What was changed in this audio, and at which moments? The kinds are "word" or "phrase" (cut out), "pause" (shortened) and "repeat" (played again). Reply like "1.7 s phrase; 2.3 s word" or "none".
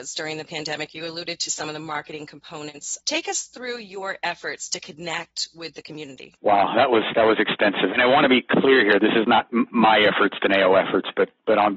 3.0 s pause; 6.4 s pause